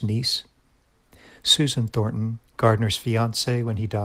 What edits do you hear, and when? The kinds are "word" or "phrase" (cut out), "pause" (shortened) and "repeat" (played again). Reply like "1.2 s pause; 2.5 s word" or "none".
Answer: 2.5 s pause